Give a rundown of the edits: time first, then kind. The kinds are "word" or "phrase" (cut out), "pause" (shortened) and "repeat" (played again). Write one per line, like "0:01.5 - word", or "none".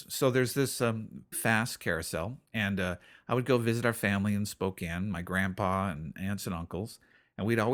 0:01.3 - word
0:02.5 - pause